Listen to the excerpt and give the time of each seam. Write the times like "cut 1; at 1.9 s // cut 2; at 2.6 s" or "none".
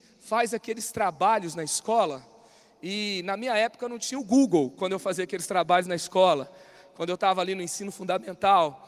none